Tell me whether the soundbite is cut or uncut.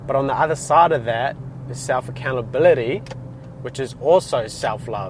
uncut